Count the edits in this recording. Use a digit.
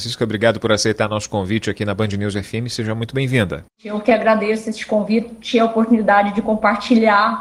1